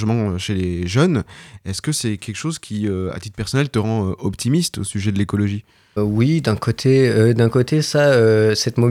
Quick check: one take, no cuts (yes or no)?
no